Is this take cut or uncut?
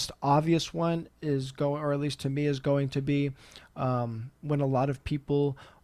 uncut